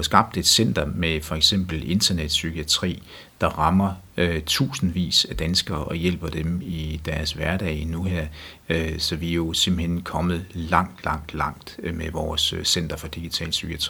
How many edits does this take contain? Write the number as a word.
zero